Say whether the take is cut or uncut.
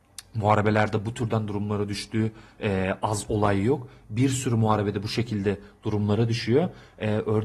uncut